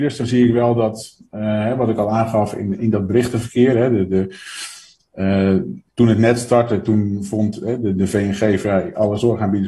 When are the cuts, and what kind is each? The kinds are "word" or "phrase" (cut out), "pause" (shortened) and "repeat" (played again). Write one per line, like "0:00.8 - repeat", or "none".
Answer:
0:02.8 - word
0:05.9 - pause